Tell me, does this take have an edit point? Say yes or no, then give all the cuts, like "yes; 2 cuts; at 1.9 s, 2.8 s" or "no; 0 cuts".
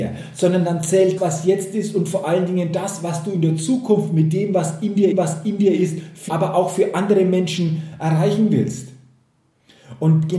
yes; 3 cuts; at 1.2 s, 5.1 s, 6.3 s